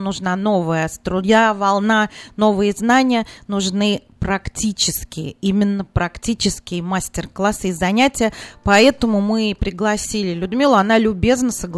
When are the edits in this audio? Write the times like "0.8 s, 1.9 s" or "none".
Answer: none